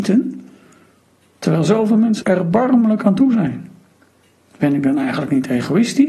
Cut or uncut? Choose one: cut